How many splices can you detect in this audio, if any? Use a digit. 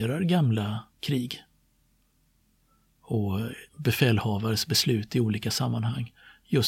2